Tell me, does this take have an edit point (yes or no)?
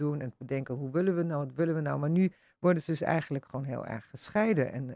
no